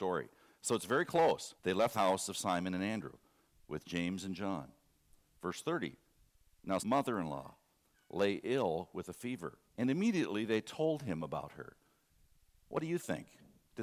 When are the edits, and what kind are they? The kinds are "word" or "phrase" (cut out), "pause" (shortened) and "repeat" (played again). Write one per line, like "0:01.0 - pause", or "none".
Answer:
0:01.6 - pause
0:01.9 - phrase
0:06.8 - word
0:09.7 - pause